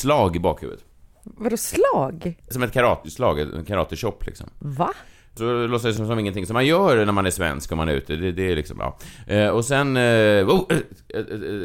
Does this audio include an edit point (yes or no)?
no